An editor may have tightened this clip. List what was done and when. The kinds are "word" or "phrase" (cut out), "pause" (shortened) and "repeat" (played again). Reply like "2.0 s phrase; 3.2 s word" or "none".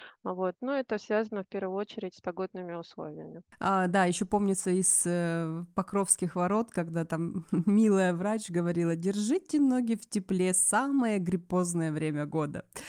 none